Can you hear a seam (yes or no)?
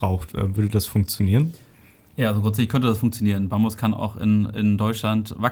no